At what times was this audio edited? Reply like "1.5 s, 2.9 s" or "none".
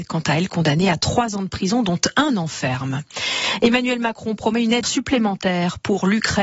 4.8 s